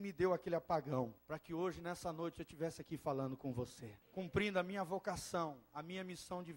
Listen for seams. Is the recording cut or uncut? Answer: cut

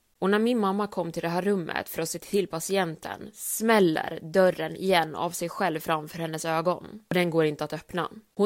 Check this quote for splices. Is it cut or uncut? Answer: uncut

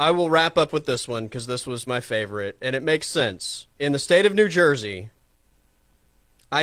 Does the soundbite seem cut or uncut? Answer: cut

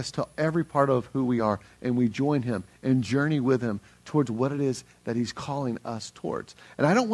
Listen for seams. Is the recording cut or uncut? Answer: uncut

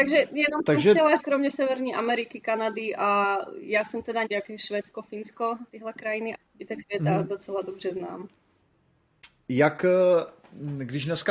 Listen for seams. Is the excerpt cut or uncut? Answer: cut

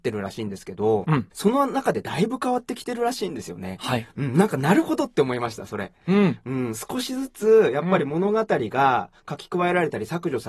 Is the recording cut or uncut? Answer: cut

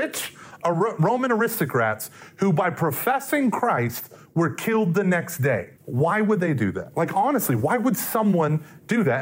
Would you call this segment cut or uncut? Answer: cut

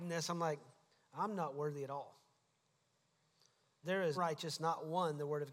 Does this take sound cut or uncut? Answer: cut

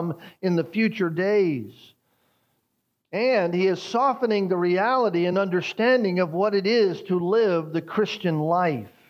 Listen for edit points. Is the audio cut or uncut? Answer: uncut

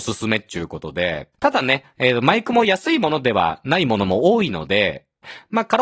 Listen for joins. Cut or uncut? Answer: cut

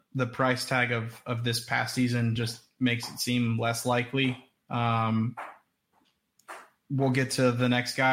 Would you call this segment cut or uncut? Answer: uncut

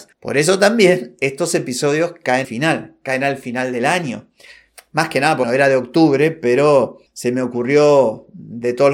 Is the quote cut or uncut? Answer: cut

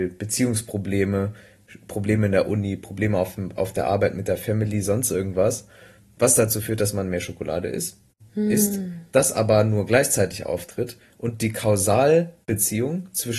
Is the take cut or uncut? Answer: uncut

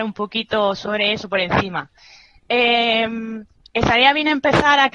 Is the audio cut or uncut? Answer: uncut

